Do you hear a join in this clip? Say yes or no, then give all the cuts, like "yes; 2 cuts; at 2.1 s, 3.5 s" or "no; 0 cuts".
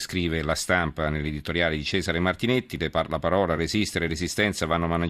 no; 0 cuts